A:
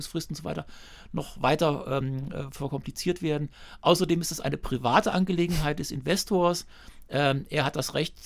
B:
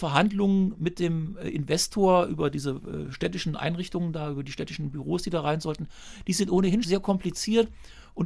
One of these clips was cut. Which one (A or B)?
B